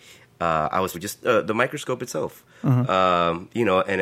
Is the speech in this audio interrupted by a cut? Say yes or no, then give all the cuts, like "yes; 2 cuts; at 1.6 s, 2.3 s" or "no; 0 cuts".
yes; 1 cut; at 0.9 s